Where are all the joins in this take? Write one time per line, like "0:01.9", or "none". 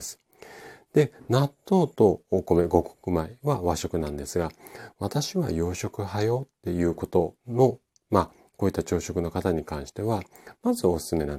0:07.4